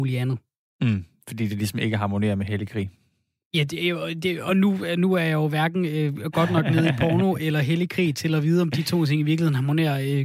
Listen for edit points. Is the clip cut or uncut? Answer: uncut